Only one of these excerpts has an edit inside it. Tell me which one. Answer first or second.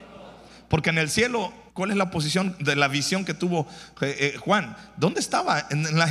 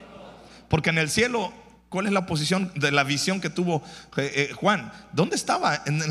first